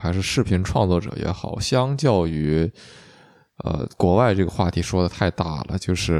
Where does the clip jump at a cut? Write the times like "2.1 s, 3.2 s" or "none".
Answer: none